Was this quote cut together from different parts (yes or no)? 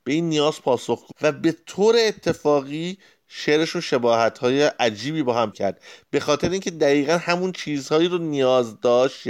yes